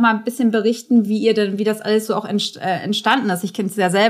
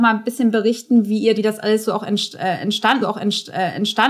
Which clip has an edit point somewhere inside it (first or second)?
second